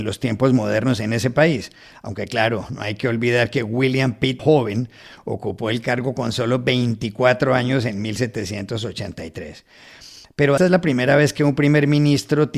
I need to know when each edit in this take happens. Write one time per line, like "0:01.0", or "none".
0:04.4
0:10.6